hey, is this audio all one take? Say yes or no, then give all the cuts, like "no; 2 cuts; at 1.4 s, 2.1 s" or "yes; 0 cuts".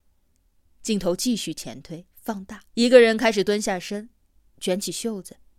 no; 2 cuts; at 2.1 s, 2.7 s